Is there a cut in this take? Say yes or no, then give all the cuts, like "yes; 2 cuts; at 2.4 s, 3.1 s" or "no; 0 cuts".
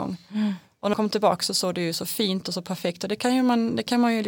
yes; 2 cuts; at 0.9 s, 2.4 s